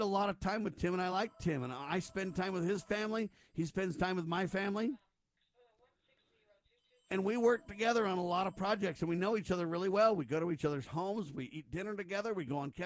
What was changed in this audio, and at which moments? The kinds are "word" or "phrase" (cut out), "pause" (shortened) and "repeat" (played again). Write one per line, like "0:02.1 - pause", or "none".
none